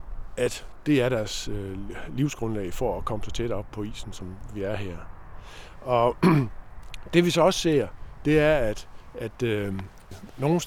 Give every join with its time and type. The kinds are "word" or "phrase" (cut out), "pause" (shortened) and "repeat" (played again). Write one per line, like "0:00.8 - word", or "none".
none